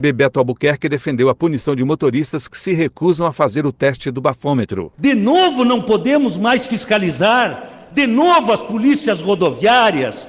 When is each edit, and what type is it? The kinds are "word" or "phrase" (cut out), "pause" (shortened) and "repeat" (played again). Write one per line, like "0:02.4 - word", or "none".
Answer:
none